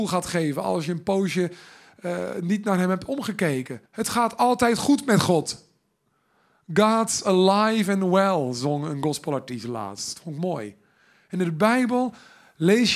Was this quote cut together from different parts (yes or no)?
yes